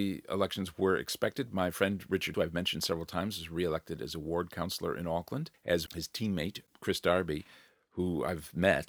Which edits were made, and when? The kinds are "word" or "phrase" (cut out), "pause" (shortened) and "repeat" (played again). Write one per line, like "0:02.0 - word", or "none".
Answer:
0:02.3 - word
0:05.9 - word